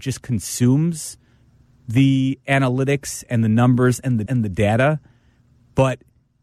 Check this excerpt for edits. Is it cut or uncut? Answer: cut